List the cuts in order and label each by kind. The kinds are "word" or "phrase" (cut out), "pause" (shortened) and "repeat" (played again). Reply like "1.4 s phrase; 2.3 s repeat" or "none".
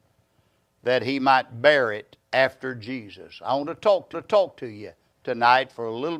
2.2 s pause; 4.1 s repeat